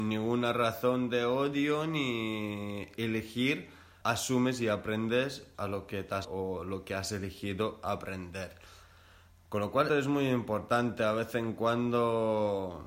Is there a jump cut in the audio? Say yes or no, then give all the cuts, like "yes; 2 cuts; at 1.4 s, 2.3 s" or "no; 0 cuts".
yes; 4 cuts; at 4.0 s, 5.5 s, 6.2 s, 9.9 s